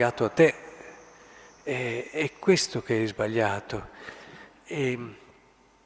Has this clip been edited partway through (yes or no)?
no